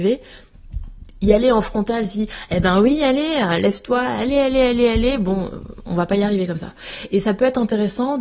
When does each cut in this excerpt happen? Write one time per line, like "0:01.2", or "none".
none

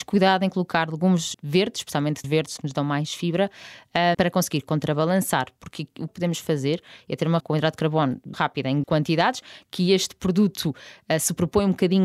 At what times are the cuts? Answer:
0:01.3
0:02.2
0:02.6
0:04.1
0:06.1
0:07.4
0:08.3
0:08.8

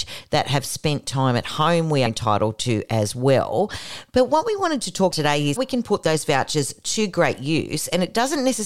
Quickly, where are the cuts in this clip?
0:02.1
0:05.1
0:05.6

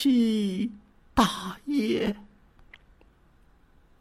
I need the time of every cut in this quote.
none

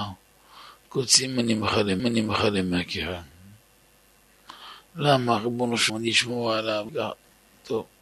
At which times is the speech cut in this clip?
0:02.0
0:05.9
0:06.9

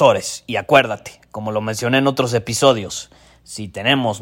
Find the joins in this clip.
none

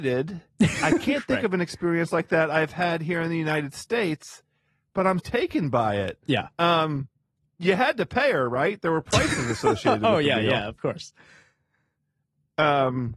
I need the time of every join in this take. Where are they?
0:05.2

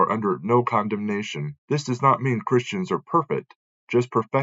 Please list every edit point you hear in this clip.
0:01.6

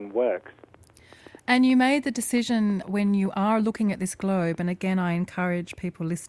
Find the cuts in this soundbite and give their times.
0:02.8

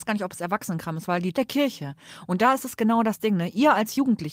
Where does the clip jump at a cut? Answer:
0:01.3

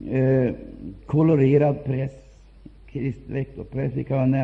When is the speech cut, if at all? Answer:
none

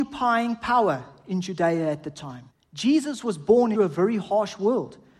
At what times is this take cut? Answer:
0:02.5
0:03.7

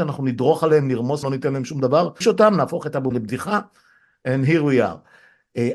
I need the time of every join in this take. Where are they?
0:01.2
0:02.2
0:03.1

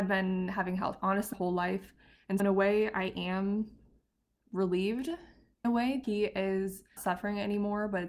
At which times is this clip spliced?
0:01.0
0:01.3
0:02.4
0:05.6
0:06.0
0:07.0

